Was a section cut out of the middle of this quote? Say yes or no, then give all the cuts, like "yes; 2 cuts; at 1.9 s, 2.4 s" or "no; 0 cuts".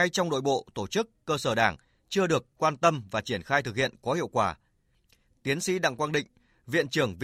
no; 0 cuts